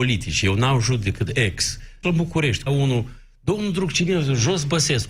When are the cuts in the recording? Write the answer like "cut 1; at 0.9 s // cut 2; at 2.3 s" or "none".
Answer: cut 1; at 1.3 s // cut 2; at 2.0 s // cut 3; at 2.7 s